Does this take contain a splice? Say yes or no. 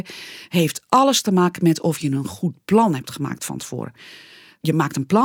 no